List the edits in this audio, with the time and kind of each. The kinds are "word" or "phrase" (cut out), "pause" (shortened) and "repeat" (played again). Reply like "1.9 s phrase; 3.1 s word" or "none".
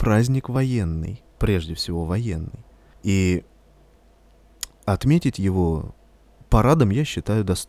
1.3 s pause; 2.9 s pause